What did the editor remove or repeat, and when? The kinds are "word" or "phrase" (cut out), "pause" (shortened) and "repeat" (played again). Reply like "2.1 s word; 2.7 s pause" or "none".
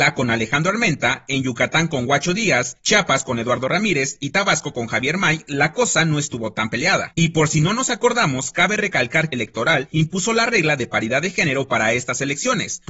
9.3 s phrase